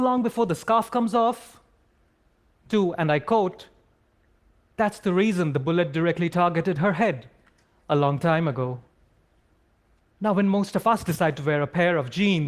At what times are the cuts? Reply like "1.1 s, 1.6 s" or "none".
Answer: none